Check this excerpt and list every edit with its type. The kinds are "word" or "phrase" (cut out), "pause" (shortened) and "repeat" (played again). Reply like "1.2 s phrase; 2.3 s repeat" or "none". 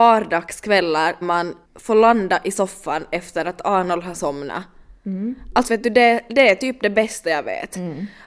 1.2 s word; 1.6 s pause; 5.7 s phrase